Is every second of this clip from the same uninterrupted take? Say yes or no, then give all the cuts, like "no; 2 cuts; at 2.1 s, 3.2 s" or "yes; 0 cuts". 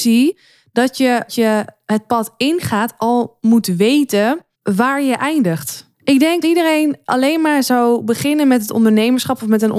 no; 4 cuts; at 1.3 s, 4.5 s, 5.9 s, 6.4 s